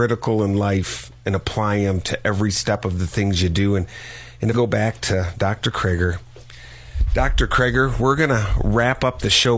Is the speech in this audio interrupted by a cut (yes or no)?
yes